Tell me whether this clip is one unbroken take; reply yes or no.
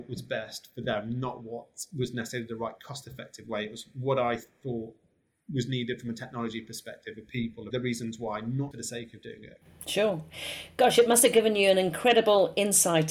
no